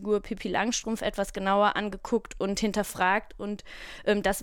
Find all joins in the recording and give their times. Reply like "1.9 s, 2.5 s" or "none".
none